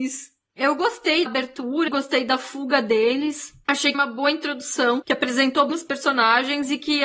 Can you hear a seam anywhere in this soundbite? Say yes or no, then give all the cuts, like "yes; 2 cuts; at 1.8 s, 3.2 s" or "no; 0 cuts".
yes; 4 cuts; at 1.3 s, 1.9 s, 3.9 s, 5.7 s